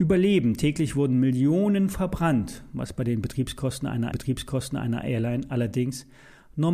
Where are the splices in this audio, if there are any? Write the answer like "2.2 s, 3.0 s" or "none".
4.1 s